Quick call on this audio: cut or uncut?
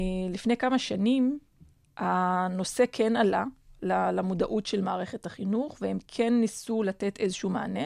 uncut